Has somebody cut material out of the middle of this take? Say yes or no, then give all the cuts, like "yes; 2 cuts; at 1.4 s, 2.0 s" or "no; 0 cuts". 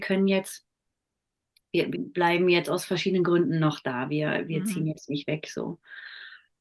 yes; 1 cut; at 1.9 s